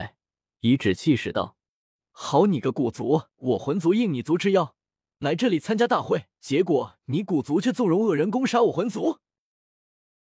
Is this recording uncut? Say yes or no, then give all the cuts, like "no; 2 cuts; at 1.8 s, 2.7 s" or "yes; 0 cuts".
no; 2 cuts; at 3.3 s, 6.3 s